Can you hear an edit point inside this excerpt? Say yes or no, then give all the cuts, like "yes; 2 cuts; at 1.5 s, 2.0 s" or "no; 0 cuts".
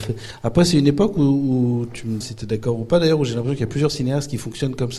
yes; 1 cut; at 2.2 s